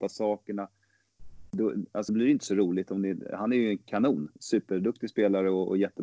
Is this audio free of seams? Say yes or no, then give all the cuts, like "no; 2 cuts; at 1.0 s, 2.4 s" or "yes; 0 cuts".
no; 2 cuts; at 2.1 s, 4.4 s